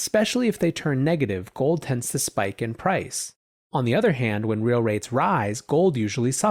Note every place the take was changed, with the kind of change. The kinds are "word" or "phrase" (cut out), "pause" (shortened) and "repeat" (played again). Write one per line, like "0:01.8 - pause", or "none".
none